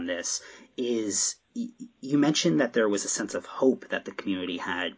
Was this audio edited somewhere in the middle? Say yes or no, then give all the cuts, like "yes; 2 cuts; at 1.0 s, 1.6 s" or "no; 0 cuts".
no; 0 cuts